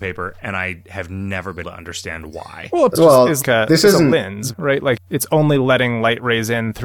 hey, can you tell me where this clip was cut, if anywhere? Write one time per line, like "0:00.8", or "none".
0:01.6
0:02.9
0:03.4
0:04.5
0:05.0